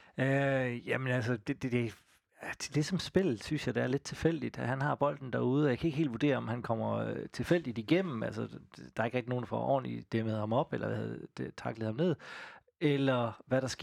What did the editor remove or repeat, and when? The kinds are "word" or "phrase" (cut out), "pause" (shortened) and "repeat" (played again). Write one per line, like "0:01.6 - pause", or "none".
none